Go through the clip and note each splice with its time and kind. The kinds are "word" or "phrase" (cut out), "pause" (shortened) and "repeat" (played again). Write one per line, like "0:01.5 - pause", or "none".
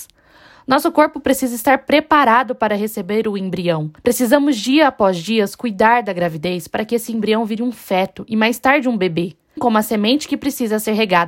0:04.0 - pause
0:09.6 - word